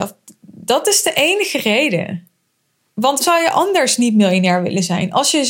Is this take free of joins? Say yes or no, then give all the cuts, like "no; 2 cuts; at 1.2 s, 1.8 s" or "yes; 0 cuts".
no; 1 cut; at 3.2 s